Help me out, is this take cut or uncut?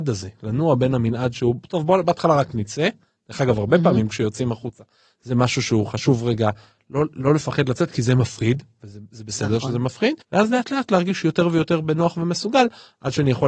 cut